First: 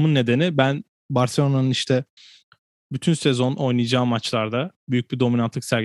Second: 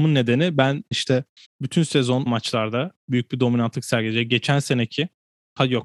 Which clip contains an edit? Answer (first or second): second